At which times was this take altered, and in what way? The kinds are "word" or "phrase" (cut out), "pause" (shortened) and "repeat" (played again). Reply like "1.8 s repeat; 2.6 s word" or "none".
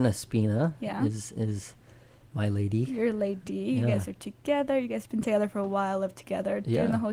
none